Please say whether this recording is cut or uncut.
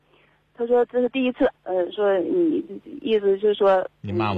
cut